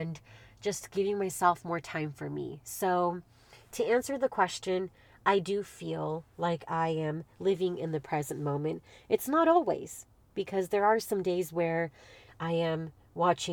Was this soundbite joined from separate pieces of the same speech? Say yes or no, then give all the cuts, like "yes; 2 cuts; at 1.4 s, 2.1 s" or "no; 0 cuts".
no; 0 cuts